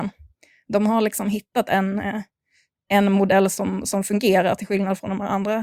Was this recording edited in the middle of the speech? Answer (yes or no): no